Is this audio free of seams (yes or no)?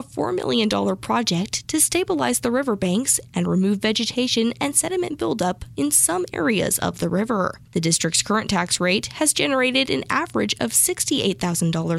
yes